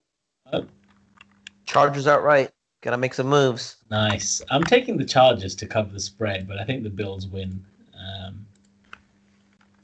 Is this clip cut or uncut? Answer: cut